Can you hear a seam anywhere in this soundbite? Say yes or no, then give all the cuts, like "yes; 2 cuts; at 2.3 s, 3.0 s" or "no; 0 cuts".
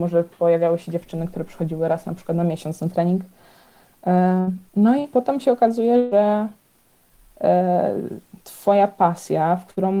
yes; 2 cuts; at 4.7 s, 8.4 s